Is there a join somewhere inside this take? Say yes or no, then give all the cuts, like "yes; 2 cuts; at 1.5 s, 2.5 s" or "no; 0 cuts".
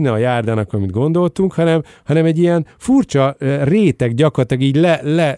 no; 0 cuts